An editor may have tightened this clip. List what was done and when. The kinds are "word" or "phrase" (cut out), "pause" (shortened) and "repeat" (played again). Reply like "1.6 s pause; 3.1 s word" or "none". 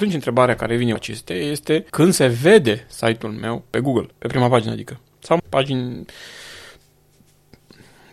1.0 s word; 1.9 s pause; 4.1 s pause; 5.4 s word

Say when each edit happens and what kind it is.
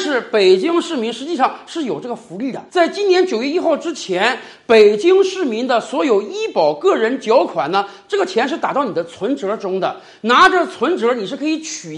2.7 s pause

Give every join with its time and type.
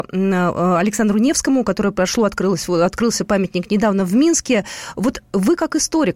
none

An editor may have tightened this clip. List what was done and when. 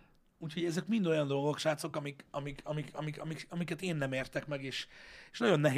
none

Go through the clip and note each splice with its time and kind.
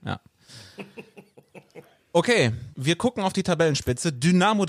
2.7 s pause

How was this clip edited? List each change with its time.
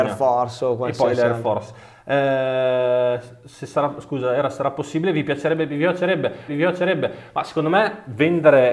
6.5 s repeat

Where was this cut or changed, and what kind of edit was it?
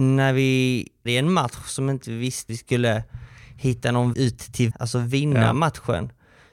1.1 s word; 2.5 s word; 4.1 s word; 4.7 s word

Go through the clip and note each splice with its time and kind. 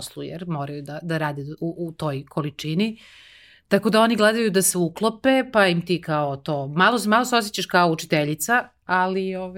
none

